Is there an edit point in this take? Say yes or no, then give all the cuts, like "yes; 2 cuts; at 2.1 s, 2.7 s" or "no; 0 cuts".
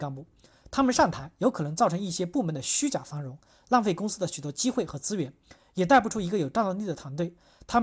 no; 0 cuts